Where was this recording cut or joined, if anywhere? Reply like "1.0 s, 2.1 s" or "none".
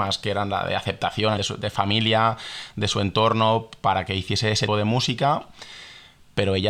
1.4 s, 4.7 s

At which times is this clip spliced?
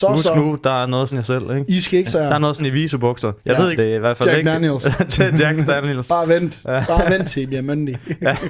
1.1 s, 2.1 s, 2.6 s, 3.4 s, 3.8 s

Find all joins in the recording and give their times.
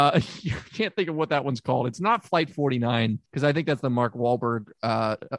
3.3 s

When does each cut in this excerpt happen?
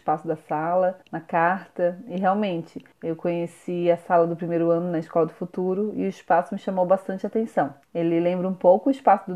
1.0 s, 2.9 s, 7.8 s

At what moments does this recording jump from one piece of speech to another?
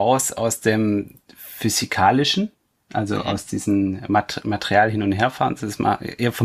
none

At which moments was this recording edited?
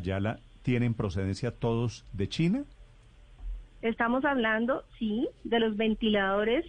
3.8 s

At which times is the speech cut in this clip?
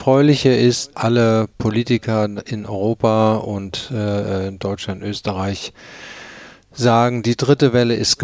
0.9 s

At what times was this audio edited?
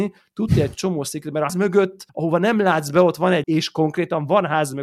1.5 s, 2.1 s, 3.4 s

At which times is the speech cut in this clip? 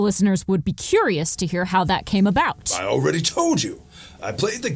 none

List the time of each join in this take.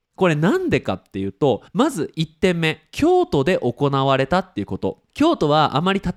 1.7 s, 5.1 s

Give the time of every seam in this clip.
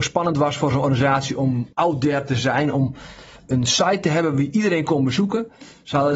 1.7 s

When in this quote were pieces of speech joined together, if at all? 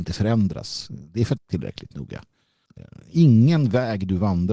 1.4 s

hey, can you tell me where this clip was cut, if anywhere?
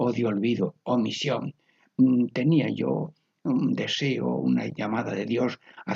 none

